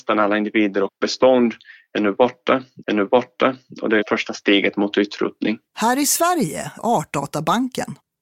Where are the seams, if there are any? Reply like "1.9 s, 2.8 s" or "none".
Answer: 2.8 s, 4.0 s, 5.7 s, 6.8 s